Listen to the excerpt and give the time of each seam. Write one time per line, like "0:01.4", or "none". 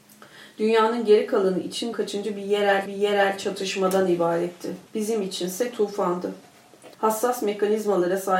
0:01.9
0:02.9
0:04.9
0:06.9